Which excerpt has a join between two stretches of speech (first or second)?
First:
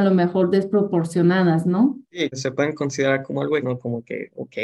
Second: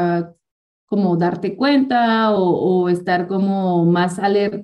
first